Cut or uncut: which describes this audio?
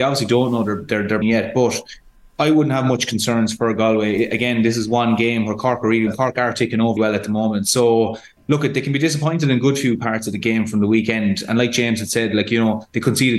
cut